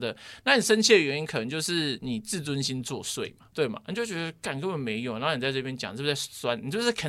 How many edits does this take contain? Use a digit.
1